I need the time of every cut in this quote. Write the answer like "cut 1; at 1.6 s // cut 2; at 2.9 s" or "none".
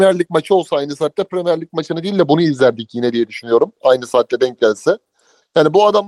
none